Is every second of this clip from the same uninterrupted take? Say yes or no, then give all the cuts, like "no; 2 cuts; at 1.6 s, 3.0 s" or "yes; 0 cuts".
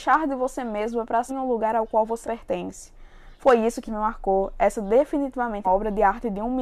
no; 5 cuts; at 1.3 s, 2.2 s, 3.3 s, 3.9 s, 5.6 s